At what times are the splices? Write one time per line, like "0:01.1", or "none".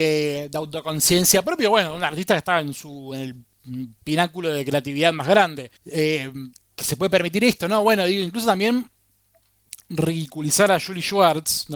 0:05.8
0:06.5